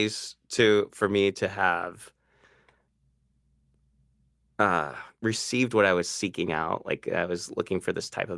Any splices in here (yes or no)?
no